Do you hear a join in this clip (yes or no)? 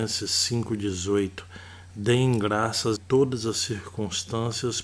yes